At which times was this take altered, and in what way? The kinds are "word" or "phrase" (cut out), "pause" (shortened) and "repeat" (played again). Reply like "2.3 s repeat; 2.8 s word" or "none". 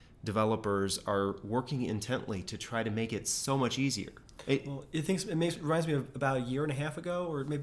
none